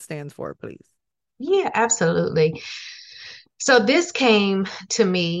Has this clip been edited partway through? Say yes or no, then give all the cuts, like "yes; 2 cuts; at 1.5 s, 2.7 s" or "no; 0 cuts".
no; 0 cuts